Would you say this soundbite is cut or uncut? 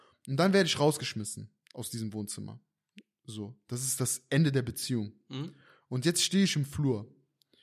uncut